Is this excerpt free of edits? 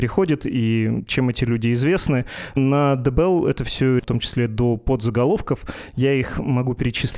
no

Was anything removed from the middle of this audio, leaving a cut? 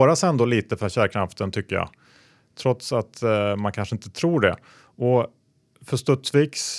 no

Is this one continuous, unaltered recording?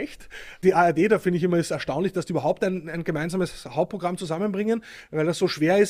yes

